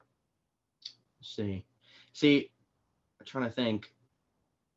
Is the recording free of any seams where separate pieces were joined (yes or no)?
yes